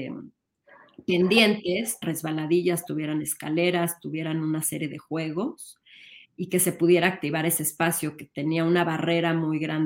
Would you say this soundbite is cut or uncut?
cut